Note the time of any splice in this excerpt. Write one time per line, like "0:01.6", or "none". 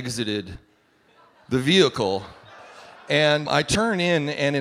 0:03.5